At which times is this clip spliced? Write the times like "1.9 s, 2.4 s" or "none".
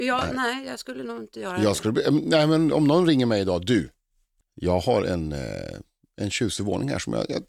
none